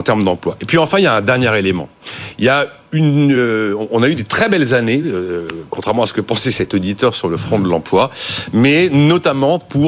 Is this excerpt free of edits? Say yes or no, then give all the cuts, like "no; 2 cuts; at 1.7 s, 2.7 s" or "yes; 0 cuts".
yes; 0 cuts